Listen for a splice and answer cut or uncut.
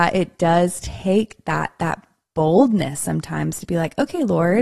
uncut